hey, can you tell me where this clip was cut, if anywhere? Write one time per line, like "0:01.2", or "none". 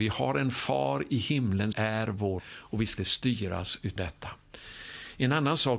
0:01.7
0:02.4
0:03.0
0:04.0